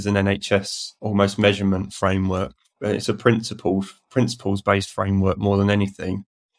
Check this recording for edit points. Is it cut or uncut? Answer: uncut